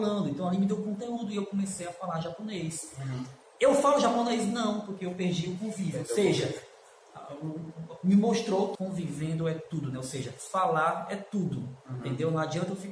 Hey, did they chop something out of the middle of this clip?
yes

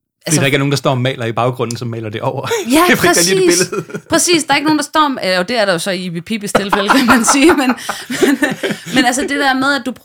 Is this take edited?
no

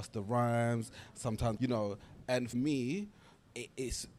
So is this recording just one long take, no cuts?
no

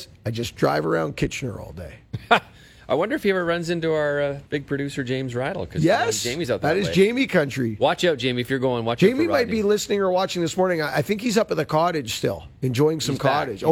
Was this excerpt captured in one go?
no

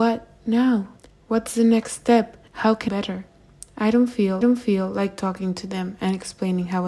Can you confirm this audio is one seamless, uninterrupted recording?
no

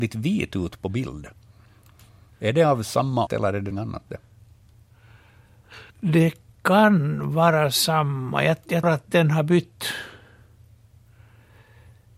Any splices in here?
yes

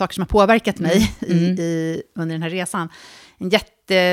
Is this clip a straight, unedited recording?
yes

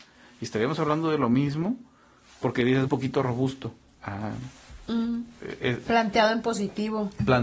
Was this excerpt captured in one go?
no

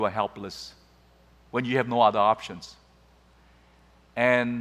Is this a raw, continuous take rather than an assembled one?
yes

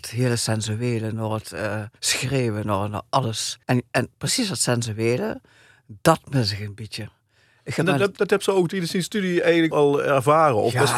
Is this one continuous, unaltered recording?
no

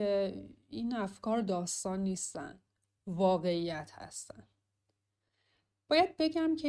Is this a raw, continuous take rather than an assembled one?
yes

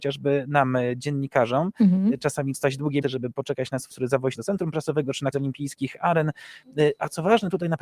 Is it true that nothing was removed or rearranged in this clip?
no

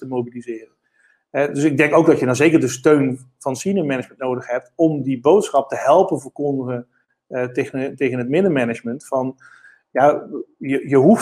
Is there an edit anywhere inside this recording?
no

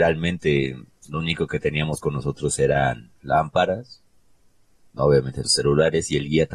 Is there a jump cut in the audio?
yes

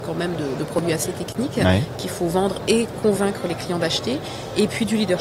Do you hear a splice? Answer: no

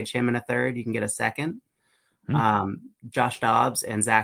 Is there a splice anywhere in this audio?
yes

